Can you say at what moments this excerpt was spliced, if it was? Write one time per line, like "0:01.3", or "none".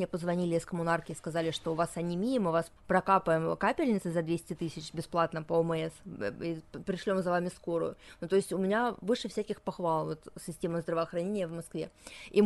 0:02.8